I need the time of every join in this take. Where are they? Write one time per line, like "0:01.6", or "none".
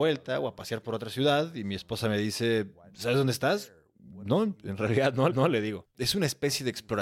0:05.3
0:05.9